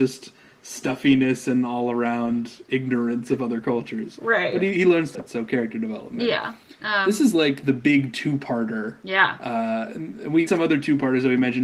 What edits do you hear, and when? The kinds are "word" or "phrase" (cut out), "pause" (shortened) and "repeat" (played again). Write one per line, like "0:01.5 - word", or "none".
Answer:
0:05.1 - word
0:10.5 - phrase